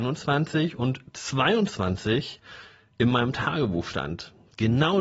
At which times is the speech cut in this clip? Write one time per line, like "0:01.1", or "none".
none

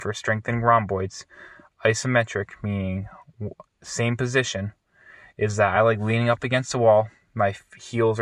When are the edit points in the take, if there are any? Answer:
none

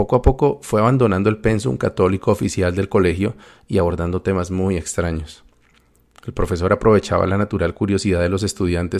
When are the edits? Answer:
none

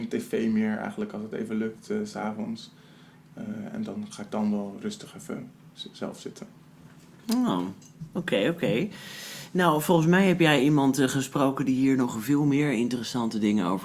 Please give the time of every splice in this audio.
none

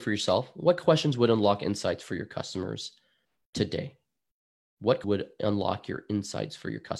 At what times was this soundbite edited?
0:05.0

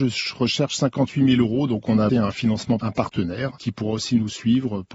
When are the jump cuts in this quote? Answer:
0:02.1
0:02.8

